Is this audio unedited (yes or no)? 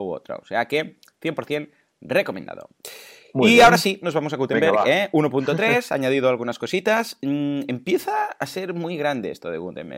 yes